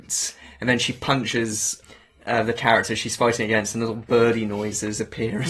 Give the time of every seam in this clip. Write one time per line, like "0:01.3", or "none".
none